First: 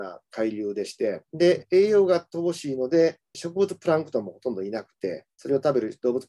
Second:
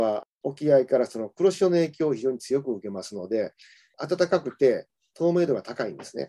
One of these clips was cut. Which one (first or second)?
first